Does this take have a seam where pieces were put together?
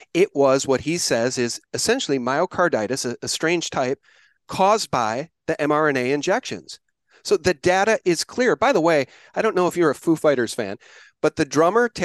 no; 0 cuts

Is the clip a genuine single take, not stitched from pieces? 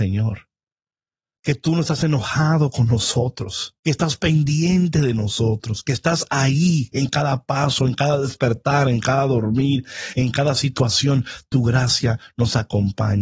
no; 1 cut; at 3.8 s

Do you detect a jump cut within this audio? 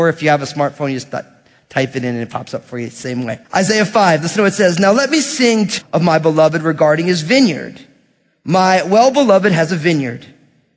yes; 2 cuts; at 3.4 s, 5.8 s

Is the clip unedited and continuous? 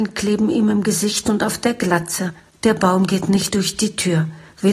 yes; 0 cuts

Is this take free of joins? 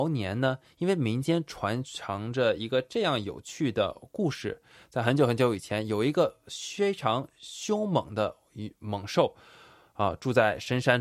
yes; 0 cuts

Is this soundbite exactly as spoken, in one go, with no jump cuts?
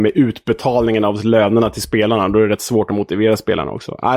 yes; 0 cuts

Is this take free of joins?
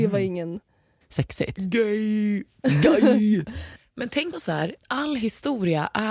no; 1 cut; at 4.3 s

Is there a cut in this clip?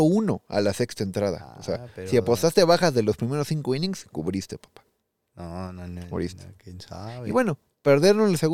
no; 0 cuts

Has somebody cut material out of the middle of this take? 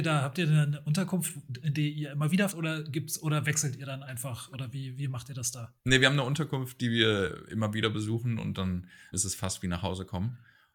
yes; 3 cuts; at 2.5 s, 4.5 s, 9.1 s

